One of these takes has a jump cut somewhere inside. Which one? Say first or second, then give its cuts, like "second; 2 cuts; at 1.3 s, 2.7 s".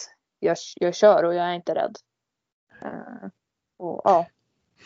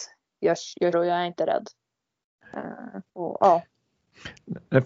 second; 2 cuts; at 0.9 s, 3.1 s